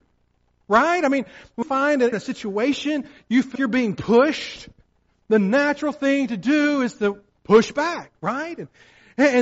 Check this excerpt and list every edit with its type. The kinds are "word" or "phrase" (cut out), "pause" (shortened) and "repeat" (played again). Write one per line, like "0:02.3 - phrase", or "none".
0:01.6 - word
0:02.1 - word
0:03.6 - word